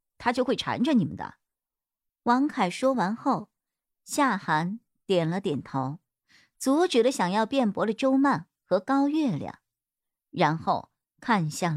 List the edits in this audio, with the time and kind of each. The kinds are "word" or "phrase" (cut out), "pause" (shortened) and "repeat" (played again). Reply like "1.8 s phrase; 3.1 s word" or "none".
none